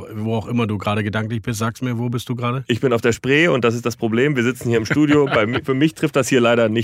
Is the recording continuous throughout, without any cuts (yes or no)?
yes